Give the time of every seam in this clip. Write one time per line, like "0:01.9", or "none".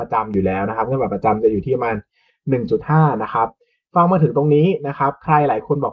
none